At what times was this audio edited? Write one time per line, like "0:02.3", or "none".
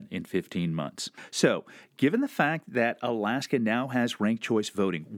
none

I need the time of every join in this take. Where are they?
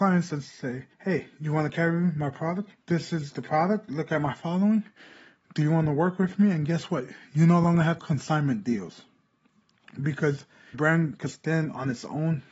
0:00.9
0:02.8
0:08.0
0:10.7

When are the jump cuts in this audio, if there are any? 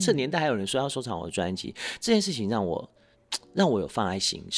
none

